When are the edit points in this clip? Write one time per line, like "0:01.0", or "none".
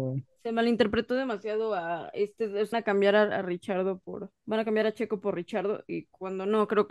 0:02.7
0:04.4